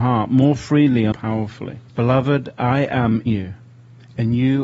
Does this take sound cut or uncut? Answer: cut